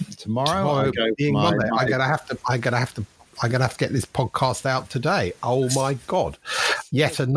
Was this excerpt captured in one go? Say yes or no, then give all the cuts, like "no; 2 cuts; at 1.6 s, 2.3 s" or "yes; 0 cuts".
yes; 0 cuts